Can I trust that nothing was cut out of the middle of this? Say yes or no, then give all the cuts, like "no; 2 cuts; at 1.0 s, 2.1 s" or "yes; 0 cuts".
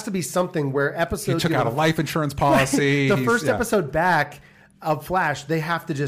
yes; 0 cuts